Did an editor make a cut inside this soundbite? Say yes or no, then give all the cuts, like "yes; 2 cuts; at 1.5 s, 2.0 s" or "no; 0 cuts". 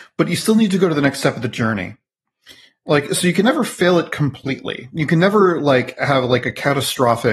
no; 0 cuts